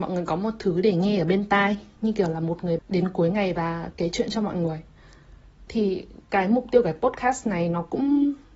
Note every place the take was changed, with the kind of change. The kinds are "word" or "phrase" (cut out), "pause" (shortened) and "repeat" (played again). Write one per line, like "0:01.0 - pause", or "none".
0:02.8 - word
0:05.7 - word